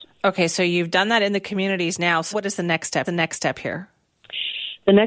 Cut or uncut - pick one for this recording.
cut